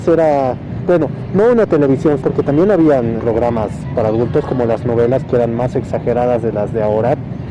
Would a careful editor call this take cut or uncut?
cut